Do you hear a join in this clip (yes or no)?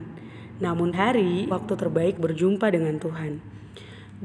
yes